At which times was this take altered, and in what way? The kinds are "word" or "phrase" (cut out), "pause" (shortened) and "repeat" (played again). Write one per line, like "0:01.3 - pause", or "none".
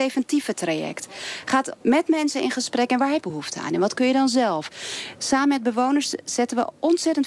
0:01.8 - pause
0:03.2 - phrase